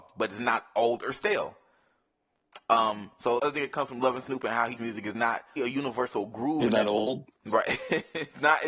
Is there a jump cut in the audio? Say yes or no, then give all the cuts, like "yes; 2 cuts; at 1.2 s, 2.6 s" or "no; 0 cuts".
yes; 3 cuts; at 3.4 s, 4.8 s, 5.6 s